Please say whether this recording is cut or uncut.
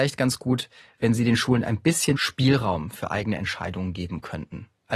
cut